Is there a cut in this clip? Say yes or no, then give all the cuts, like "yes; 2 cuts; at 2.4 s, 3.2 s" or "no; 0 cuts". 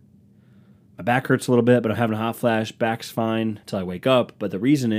yes; 1 cut; at 3.6 s